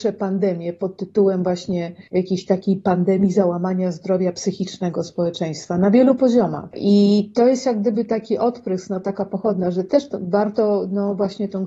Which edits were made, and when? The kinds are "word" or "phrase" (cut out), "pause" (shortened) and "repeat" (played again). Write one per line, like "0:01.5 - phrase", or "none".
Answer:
0:02.1 - pause